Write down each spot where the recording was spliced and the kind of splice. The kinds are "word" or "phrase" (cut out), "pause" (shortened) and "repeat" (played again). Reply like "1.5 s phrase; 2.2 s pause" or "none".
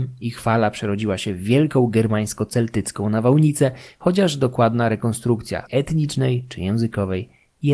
5.7 s word